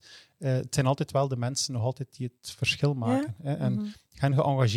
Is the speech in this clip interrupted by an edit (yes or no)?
no